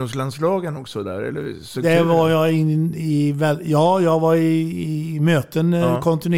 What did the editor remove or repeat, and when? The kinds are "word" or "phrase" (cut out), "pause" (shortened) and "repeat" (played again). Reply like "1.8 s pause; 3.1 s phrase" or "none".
none